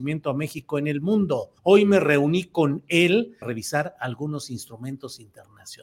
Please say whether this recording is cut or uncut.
cut